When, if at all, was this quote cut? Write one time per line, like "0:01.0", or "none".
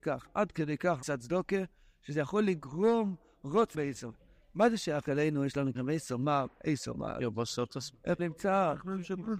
0:01.0
0:03.7
0:05.7
0:08.2